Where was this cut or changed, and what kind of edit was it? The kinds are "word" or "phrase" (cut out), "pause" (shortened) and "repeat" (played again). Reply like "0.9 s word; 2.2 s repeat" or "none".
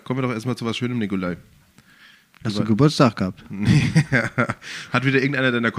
none